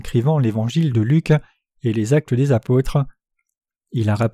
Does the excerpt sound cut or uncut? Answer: uncut